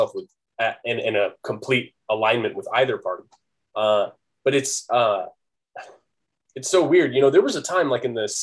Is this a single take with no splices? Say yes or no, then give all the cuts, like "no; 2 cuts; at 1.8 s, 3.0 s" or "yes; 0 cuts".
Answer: yes; 0 cuts